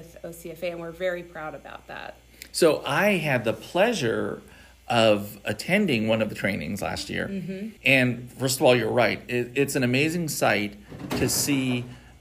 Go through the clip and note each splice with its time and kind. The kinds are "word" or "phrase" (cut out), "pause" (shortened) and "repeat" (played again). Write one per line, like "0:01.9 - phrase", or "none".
0:07.8 - pause